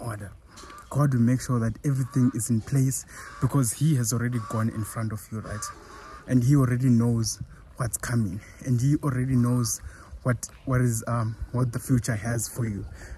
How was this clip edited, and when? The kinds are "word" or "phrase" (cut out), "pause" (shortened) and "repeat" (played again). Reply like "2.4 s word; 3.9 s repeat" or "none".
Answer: none